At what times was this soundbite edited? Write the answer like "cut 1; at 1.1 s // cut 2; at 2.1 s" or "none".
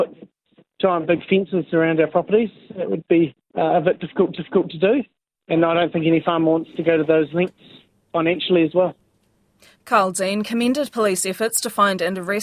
cut 1; at 4.3 s